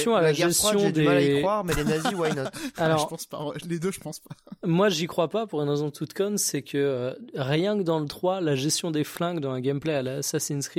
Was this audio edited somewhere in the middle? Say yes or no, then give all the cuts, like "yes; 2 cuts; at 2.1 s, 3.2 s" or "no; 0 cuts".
no; 0 cuts